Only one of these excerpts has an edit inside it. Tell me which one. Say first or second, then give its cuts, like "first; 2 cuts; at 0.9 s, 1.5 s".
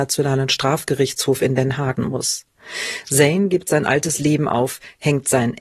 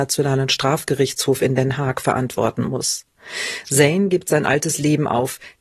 first; 1 cut; at 2.0 s